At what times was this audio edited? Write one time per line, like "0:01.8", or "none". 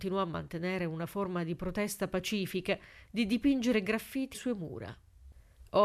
0:04.3